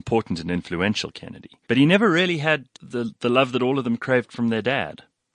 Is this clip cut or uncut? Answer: cut